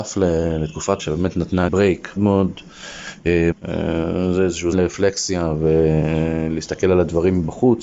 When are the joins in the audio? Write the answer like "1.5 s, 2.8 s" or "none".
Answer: 1.0 s, 1.7 s, 2.2 s, 3.5 s, 4.7 s